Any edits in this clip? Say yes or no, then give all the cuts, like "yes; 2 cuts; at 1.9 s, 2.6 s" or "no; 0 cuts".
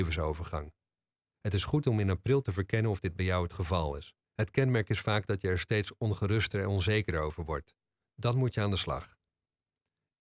yes; 1 cut; at 4.2 s